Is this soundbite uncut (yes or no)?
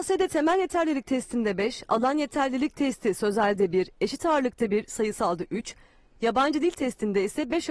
yes